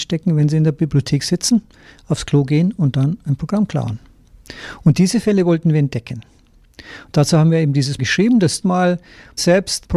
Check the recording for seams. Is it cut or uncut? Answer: cut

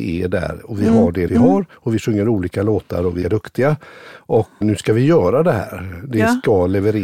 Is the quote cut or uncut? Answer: cut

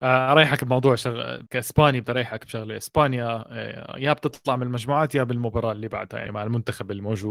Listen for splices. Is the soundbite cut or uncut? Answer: cut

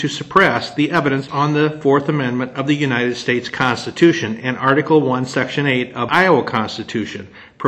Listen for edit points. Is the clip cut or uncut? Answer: cut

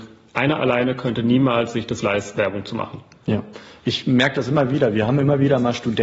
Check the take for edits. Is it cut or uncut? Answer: cut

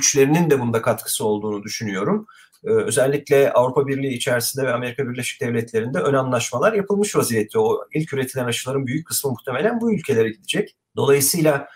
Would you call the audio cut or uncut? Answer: uncut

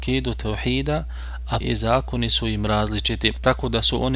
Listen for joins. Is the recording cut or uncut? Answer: cut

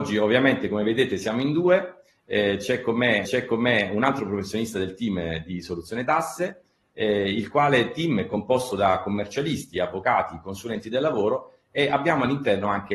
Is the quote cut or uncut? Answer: cut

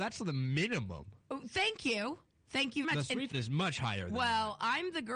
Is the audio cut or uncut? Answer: cut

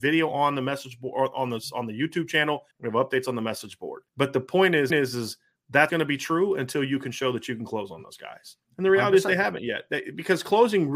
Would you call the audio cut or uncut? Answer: cut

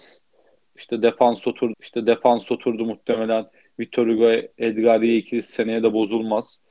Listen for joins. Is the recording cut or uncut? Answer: cut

